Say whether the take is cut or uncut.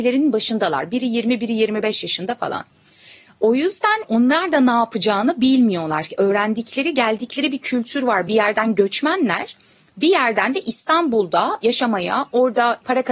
uncut